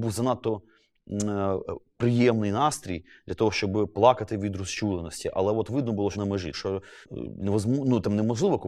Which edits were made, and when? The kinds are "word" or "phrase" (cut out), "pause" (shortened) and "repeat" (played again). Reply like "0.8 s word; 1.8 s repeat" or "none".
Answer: 6.1 s phrase; 6.5 s word; 7.0 s pause